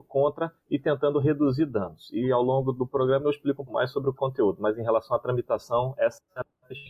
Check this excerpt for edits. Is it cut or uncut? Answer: cut